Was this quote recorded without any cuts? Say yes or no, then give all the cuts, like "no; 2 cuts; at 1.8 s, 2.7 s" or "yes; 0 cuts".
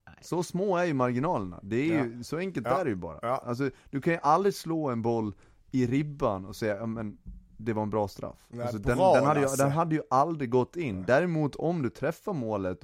yes; 0 cuts